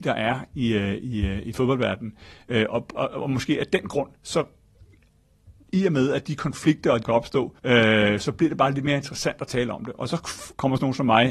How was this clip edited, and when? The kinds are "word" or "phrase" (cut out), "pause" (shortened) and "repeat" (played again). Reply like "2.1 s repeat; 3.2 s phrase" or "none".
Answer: 3.0 s word; 4.2 s pause; 7.0 s phrase; 7.6 s pause